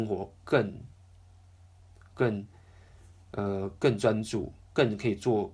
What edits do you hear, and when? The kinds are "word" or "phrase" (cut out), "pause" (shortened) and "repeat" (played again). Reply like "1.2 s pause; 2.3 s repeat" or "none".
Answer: none